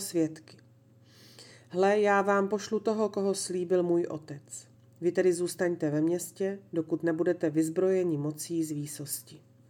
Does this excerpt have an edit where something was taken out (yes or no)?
no